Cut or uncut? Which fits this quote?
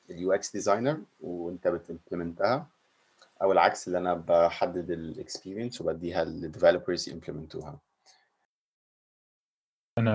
uncut